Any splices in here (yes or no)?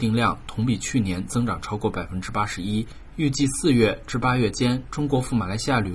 no